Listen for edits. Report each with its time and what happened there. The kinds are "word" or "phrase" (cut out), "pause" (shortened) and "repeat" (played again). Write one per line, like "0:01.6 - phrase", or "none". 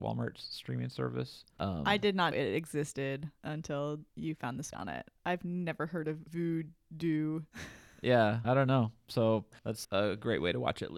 0:02.3 - word
0:04.7 - word
0:07.5 - pause
0:08.4 - word
0:09.8 - word